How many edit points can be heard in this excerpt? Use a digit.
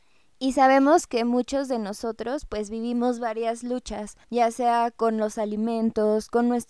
1